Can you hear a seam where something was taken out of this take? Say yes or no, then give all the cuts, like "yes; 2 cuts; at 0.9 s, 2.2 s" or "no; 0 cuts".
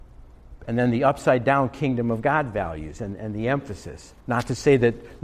yes; 1 cut; at 4.2 s